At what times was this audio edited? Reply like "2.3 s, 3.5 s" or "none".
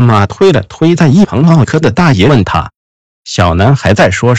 2.8 s